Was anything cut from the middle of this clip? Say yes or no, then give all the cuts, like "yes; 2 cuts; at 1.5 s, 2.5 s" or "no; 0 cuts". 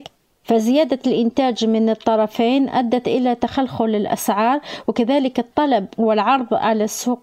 no; 0 cuts